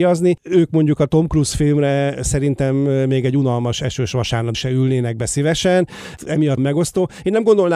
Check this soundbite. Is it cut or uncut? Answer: cut